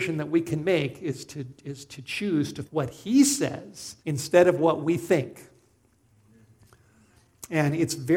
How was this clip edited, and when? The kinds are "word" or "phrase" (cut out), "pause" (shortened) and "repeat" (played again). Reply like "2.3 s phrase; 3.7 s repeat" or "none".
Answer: 2.7 s word; 4.0 s pause